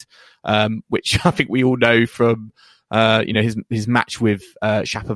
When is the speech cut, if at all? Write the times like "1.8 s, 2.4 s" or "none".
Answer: none